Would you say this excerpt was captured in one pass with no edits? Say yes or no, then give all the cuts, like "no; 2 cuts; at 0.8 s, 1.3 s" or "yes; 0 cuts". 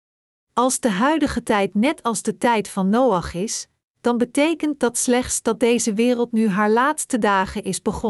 yes; 0 cuts